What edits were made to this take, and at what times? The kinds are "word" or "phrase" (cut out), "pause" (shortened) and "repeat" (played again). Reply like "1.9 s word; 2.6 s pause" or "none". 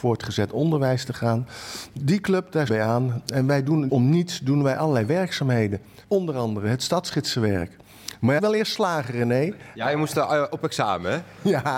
2.7 s phrase; 3.9 s word; 6.0 s pause; 8.4 s phrase